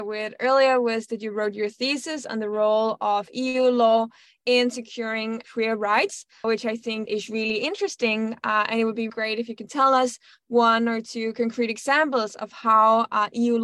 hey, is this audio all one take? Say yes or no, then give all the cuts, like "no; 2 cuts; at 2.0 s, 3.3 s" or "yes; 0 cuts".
no; 4 cuts; at 5.4 s, 6.4 s, 7.1 s, 9.1 s